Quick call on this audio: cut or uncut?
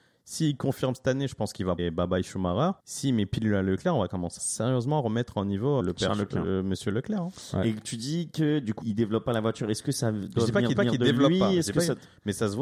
cut